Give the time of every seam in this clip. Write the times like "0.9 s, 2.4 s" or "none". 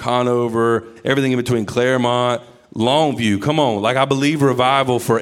none